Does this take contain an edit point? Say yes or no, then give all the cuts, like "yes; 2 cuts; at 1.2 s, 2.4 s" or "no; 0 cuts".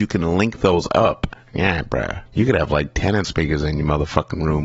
yes; 3 cuts; at 1.4 s, 2.3 s, 3.2 s